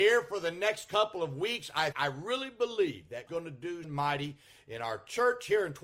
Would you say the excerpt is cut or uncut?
cut